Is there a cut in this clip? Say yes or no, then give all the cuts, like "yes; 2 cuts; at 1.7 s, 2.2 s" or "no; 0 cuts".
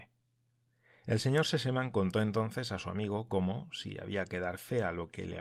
no; 0 cuts